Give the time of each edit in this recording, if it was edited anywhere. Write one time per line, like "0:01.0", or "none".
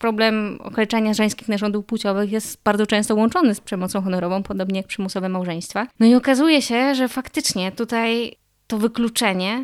0:05.9